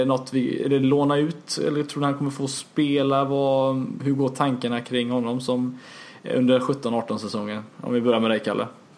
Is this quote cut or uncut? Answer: uncut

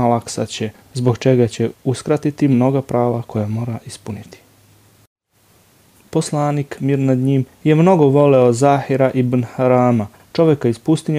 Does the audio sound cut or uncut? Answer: uncut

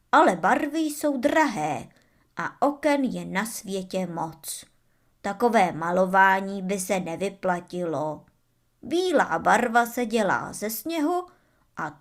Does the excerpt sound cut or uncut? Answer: uncut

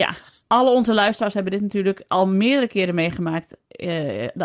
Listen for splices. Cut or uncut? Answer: uncut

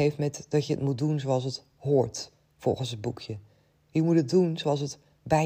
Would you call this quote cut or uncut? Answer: uncut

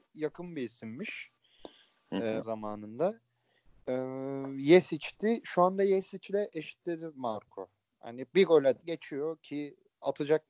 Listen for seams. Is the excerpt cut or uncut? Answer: cut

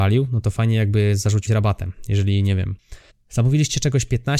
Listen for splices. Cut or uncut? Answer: cut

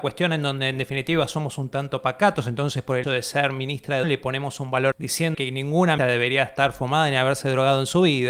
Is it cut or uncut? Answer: cut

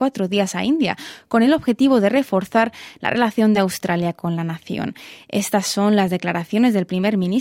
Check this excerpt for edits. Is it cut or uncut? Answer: uncut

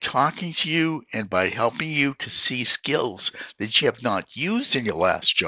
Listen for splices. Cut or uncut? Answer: cut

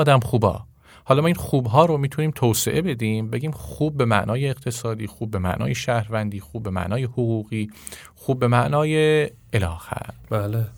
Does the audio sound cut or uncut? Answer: uncut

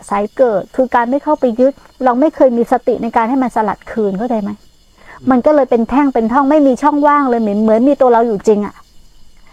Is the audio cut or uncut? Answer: uncut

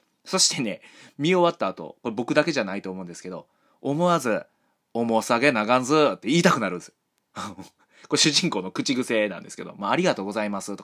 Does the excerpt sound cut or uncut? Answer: uncut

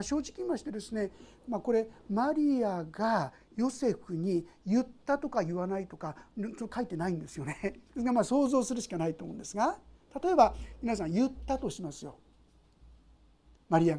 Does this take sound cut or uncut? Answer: cut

